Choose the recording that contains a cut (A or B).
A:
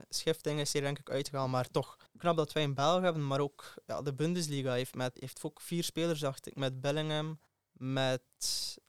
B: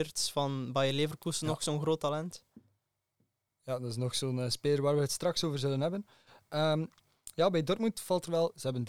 A